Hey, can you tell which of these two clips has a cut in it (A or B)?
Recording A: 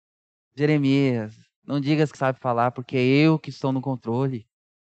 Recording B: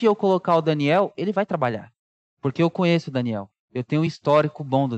A